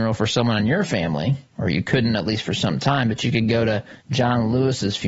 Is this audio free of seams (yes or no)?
no